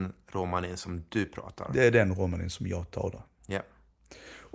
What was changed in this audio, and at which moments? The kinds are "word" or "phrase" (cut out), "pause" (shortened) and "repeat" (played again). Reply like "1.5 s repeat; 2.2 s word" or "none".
none